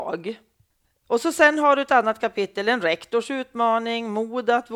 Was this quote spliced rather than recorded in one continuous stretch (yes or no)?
no